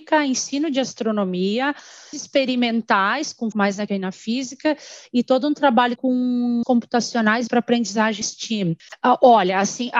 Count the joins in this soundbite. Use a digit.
7